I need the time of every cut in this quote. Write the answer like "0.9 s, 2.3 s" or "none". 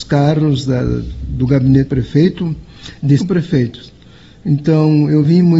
1.9 s, 3.2 s